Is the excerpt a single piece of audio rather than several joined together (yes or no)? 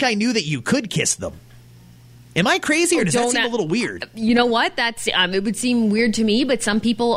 yes